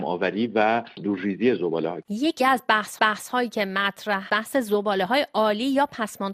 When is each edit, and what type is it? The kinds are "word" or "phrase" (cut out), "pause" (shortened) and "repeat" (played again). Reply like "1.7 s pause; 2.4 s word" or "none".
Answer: 2.4 s word; 3.0 s repeat; 4.3 s word